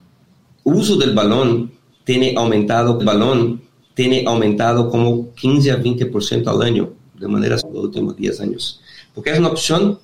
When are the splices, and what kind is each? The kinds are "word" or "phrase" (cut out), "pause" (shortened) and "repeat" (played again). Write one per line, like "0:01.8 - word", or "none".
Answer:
0:03.0 - repeat
0:07.6 - word